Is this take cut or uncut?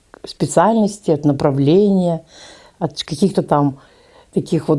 uncut